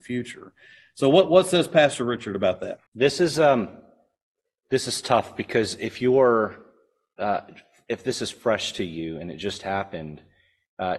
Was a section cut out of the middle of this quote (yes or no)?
yes